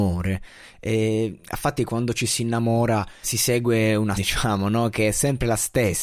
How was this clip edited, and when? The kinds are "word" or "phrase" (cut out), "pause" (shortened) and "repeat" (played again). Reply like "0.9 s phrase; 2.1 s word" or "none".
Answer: 1.8 s word; 3.2 s word; 4.2 s word